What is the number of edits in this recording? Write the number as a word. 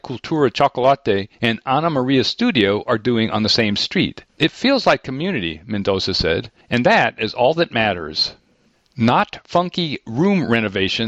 four